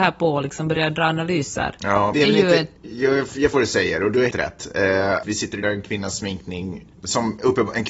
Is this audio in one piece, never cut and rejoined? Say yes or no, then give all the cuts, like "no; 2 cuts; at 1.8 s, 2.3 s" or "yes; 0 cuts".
no; 7 cuts; at 2.1 s, 2.8 s, 3.5 s, 4.3 s, 5.2 s, 5.6 s, 6.9 s